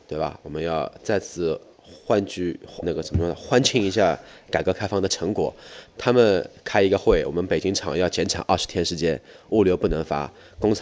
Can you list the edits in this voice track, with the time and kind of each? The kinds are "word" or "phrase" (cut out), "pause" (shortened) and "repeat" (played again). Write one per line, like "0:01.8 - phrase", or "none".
0:02.8 - word